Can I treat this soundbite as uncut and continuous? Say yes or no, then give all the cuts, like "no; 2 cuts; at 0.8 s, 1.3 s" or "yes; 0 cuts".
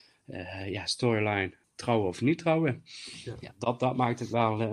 no; 1 cut; at 1.6 s